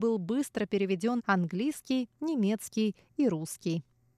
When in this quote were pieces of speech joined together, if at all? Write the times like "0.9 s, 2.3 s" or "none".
1.2 s